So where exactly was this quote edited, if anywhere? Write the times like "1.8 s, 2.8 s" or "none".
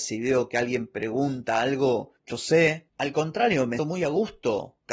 2.3 s, 3.8 s